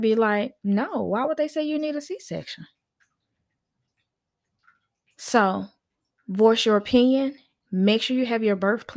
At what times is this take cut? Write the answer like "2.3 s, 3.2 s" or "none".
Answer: none

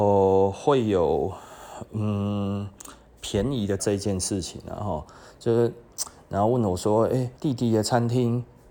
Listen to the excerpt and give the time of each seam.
3.8 s, 7.4 s

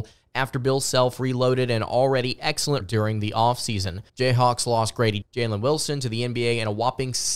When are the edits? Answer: 2.8 s, 4.1 s, 5.2 s

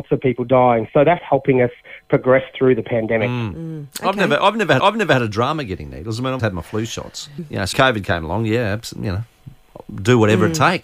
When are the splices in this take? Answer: 1.2 s, 4.8 s, 6.4 s, 7.4 s, 7.7 s

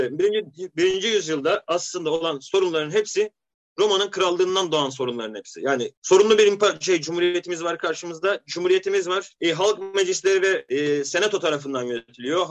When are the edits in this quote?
none

